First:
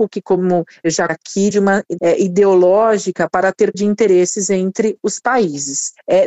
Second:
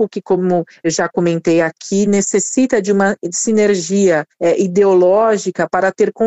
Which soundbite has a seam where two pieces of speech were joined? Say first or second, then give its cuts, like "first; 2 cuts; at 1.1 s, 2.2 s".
first; 4 cuts; at 1.1 s, 1.5 s, 2.0 s, 3.7 s